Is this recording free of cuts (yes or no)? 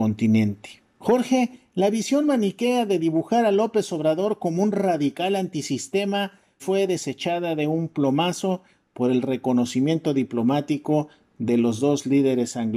no